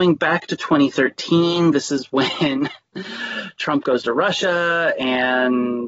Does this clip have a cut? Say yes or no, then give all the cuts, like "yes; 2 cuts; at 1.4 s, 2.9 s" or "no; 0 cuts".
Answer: no; 0 cuts